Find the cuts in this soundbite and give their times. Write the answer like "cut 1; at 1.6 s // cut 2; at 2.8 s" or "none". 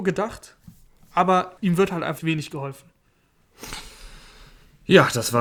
cut 1; at 1.6 s // cut 2; at 2.2 s